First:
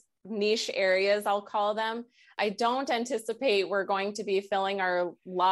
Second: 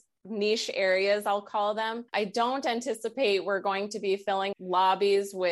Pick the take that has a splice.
second; 2 cuts; at 2.1 s, 4.5 s

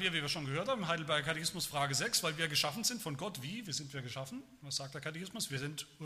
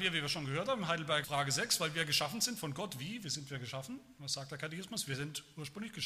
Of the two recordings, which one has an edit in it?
second; 1 cut; at 1.2 s

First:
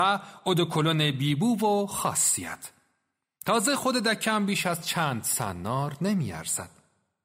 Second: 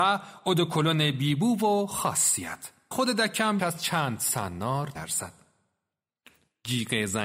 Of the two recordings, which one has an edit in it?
second; 3 cuts; at 2.9 s, 3.6 s, 5.0 s

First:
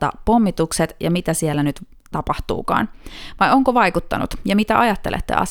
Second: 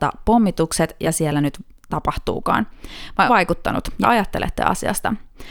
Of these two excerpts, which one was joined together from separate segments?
second; 3 cuts; at 1.0 s, 3.3 s, 4.0 s

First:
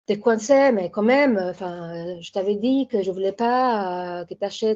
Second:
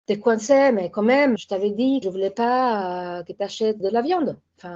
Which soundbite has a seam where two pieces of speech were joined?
second; 3 cuts; at 1.4 s, 2.0 s, 3.8 s

